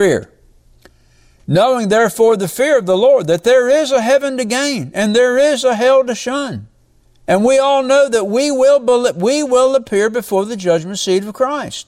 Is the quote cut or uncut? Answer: cut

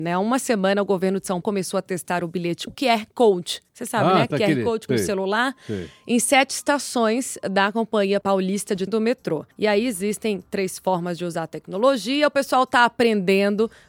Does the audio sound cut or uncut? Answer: cut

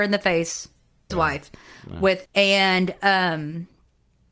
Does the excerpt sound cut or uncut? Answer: cut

